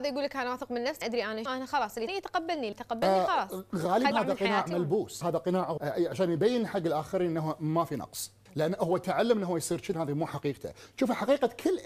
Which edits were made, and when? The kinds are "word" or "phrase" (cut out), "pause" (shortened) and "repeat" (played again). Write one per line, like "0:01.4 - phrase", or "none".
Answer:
0:01.0 - word
0:01.5 - word
0:02.1 - word
0:02.7 - word
0:04.1 - word
0:05.2 - word
0:05.8 - word
0:08.5 - word
0:09.9 - word